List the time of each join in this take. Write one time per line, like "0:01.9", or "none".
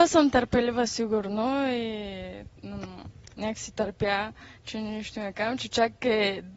0:02.6